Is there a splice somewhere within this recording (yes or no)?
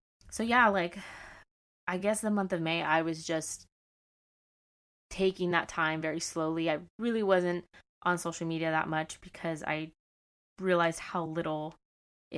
no